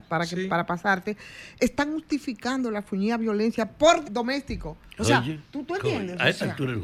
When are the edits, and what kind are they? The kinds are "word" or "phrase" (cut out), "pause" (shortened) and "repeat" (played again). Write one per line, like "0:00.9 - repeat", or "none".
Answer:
0:04.0 - word
0:05.4 - pause